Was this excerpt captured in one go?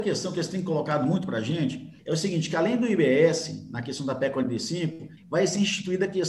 no; 2 cuts; at 2.0 s, 5.2 s

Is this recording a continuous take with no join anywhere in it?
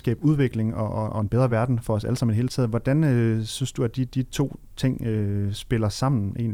yes; 0 cuts

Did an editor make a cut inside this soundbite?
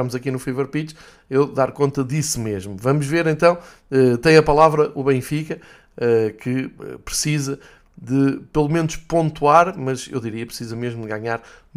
no; 0 cuts

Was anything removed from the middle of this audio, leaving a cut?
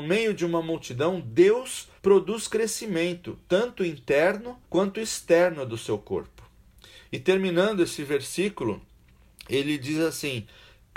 yes; 2 cuts; at 2.0 s, 4.6 s

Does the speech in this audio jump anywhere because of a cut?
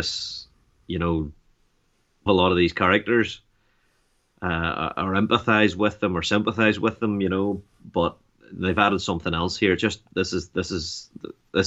yes; 1 cut; at 2.3 s

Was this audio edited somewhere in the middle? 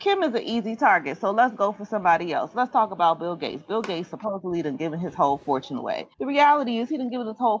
yes; 1 cut; at 6.1 s

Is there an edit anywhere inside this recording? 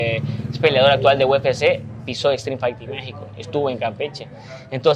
no; 0 cuts

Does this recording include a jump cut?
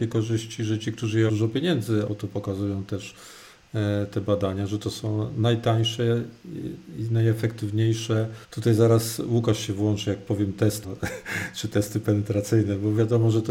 yes; 4 cuts; at 1.3 s, 2.1 s, 8.4 s, 10.8 s

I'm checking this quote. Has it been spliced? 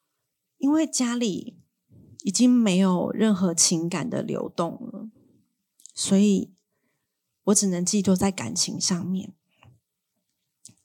no; 0 cuts

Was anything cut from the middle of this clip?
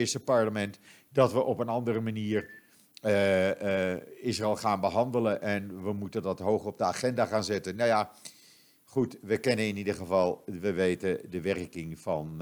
no; 0 cuts

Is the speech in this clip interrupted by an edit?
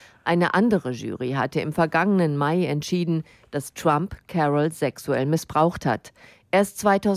no; 0 cuts

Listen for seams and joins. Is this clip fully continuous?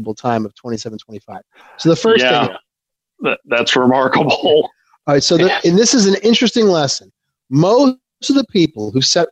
yes; 0 cuts

